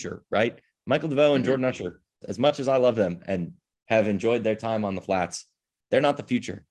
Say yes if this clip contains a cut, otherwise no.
yes